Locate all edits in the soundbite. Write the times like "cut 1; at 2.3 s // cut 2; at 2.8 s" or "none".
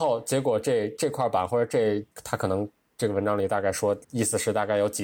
cut 1; at 2.1 s // cut 2; at 4.0 s